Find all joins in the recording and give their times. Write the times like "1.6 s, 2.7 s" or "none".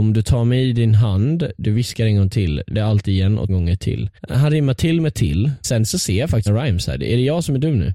2.7 s, 3.5 s, 4.2 s, 5.6 s, 6.5 s